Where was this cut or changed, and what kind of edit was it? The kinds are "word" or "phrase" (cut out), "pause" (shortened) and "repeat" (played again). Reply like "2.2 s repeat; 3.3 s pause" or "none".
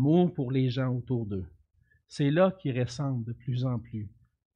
none